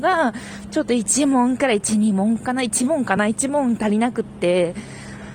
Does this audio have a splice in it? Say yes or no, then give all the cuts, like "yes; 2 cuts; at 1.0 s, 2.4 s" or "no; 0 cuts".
no; 0 cuts